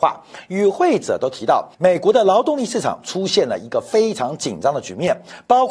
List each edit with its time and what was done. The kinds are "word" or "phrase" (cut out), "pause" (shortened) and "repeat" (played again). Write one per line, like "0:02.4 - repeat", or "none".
0:01.7 - pause